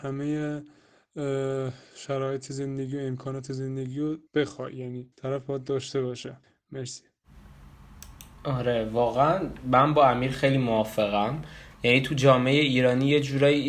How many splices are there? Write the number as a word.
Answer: three